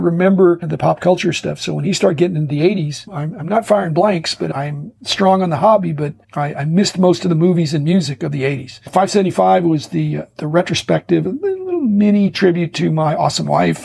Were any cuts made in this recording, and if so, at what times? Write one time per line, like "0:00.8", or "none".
0:06.2